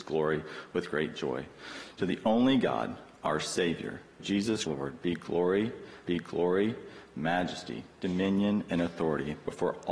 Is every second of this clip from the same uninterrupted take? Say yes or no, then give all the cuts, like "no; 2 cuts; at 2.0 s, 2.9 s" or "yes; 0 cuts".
no; 3 cuts; at 4.2 s, 4.7 s, 6.0 s